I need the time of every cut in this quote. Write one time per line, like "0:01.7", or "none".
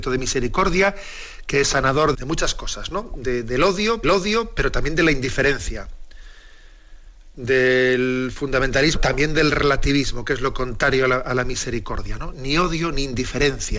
0:02.1
0:04.0
0:09.0